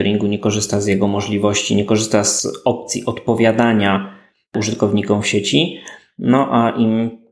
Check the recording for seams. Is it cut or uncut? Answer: uncut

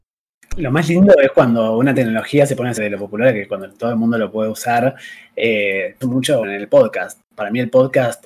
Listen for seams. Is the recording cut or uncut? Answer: cut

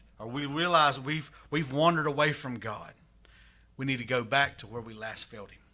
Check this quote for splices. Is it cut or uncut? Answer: uncut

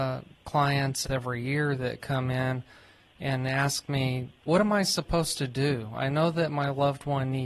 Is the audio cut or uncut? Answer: cut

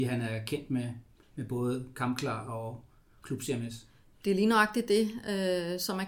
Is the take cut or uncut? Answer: uncut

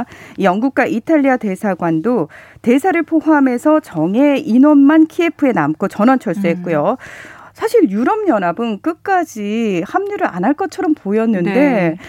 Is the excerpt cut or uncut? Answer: uncut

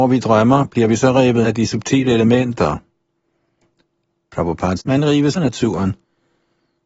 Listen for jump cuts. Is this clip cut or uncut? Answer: cut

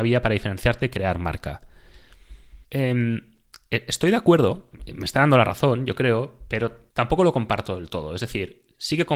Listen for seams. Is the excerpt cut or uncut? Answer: cut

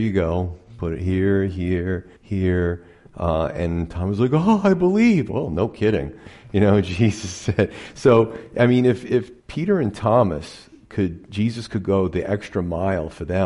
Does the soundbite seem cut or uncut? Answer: cut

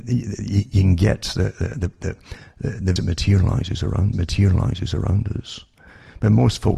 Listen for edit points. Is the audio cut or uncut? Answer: cut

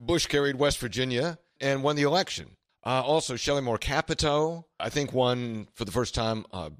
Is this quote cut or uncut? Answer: cut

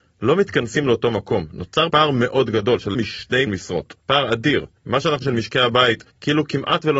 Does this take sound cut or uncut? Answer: cut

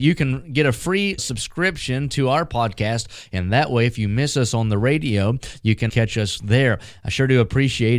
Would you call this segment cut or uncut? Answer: cut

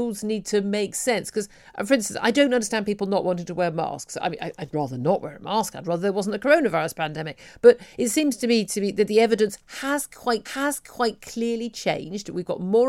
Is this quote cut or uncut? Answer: cut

